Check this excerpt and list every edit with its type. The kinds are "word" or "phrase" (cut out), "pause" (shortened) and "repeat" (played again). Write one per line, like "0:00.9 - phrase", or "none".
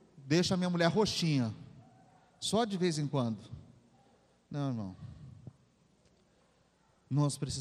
none